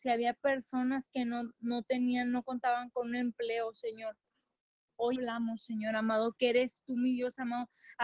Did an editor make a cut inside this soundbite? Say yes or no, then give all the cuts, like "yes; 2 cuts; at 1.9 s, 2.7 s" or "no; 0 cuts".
no; 0 cuts